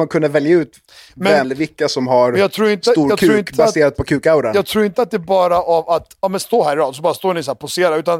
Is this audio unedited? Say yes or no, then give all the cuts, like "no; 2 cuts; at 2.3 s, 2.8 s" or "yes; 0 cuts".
no; 1 cut; at 1.4 s